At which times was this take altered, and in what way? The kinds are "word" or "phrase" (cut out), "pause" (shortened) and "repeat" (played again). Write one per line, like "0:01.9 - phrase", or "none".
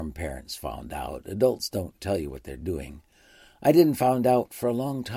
none